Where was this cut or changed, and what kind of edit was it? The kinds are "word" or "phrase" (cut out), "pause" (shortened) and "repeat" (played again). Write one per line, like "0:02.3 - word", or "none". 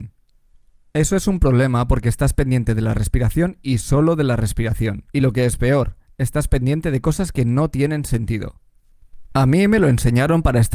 0:05.1 - pause

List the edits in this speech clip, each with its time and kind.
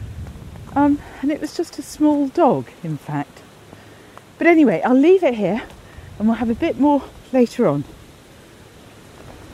none

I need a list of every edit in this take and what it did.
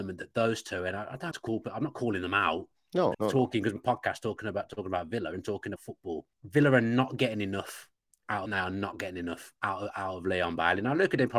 0:01.3 - word
0:03.1 - word
0:03.8 - phrase
0:05.8 - word
0:06.3 - pause
0:08.5 - phrase
0:09.6 - pause

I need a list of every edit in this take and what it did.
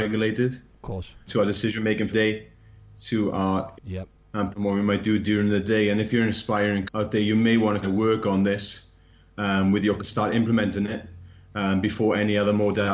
0:01.3 - word
0:02.1 - word
0:03.7 - word
0:04.5 - word
0:06.9 - word
0:07.8 - word
0:10.0 - word

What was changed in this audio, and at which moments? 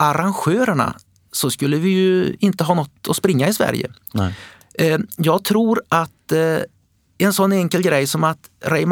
none

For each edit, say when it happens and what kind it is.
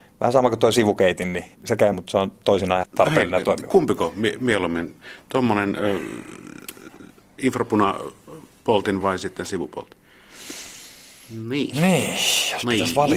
0:01.5 - pause
0:01.9 - phrase
0:02.8 - word
0:09.0 - word

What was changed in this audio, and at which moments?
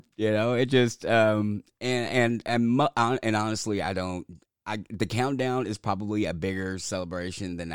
none

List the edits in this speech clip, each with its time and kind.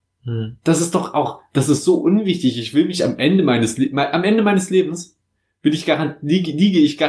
none

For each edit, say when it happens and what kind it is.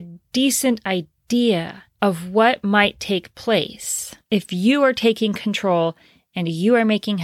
none

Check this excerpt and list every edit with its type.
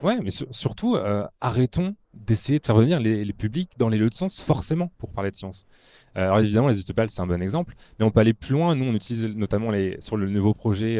none

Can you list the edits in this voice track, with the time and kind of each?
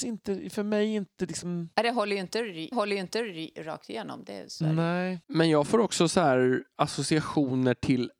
0:01.7 - pause
0:02.7 - repeat
0:05.2 - pause

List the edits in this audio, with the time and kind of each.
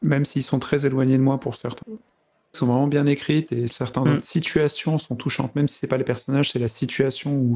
0:01.8 - phrase
0:02.5 - phrase
0:03.7 - word

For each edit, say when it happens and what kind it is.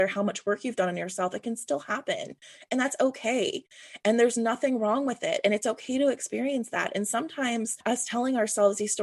none

